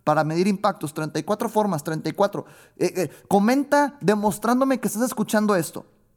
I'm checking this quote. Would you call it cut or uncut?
uncut